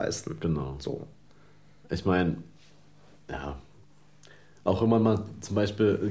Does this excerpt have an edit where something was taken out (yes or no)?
yes